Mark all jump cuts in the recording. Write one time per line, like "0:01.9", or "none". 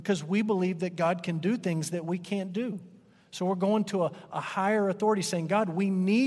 none